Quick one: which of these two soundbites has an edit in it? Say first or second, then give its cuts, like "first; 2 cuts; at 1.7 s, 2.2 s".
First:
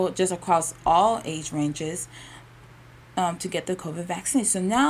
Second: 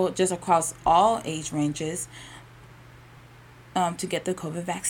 first; 1 cut; at 3.0 s